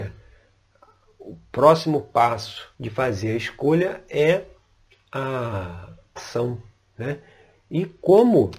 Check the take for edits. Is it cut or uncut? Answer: cut